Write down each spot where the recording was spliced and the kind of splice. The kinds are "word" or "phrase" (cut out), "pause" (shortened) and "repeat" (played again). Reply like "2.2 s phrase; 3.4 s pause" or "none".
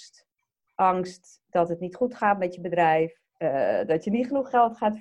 3.3 s pause